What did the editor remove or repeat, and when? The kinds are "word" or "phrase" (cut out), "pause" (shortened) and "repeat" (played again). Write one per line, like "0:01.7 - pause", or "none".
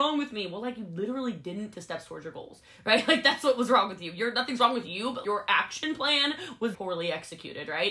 0:01.7 - word
0:05.2 - word
0:06.7 - word